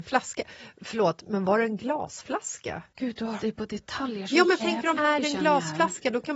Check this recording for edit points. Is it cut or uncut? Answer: cut